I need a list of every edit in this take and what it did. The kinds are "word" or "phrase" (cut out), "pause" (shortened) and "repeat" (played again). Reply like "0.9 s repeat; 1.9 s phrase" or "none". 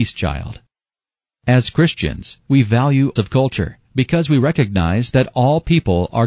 3.2 s phrase; 3.8 s pause